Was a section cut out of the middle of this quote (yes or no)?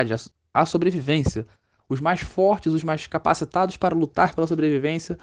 no